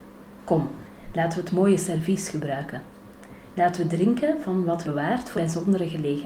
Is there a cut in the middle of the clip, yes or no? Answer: yes